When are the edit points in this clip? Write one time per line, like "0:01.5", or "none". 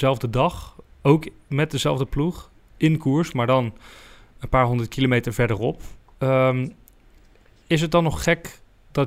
none